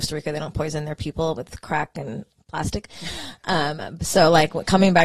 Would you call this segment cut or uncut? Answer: uncut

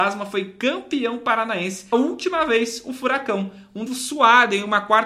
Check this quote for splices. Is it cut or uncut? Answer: cut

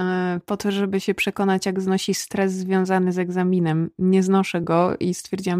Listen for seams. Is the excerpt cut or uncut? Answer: uncut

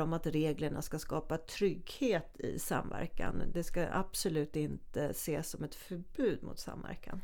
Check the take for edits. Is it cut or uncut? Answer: uncut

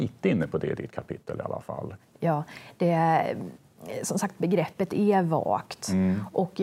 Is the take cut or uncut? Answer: uncut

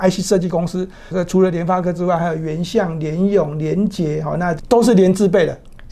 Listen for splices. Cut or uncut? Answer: cut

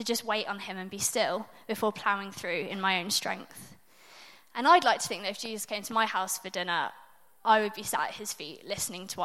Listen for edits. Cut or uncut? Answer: uncut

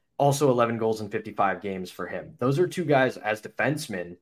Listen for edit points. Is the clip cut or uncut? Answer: uncut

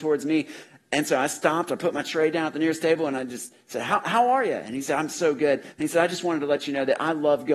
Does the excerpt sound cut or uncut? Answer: uncut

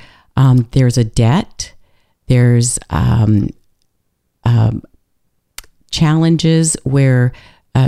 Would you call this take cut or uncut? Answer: uncut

